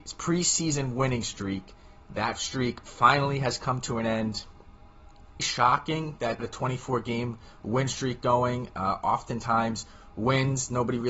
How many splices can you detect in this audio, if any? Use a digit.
2